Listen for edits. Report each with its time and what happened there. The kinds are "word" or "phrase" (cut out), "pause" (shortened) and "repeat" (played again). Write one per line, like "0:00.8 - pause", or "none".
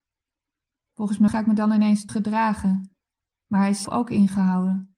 0:01.3 - word
0:02.1 - word
0:03.8 - word